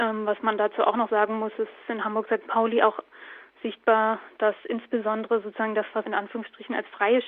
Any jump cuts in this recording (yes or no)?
yes